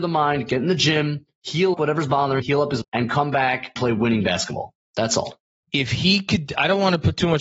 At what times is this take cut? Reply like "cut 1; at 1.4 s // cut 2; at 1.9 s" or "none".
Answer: cut 1; at 1.7 s // cut 2; at 2.4 s // cut 3; at 2.8 s // cut 4; at 3.8 s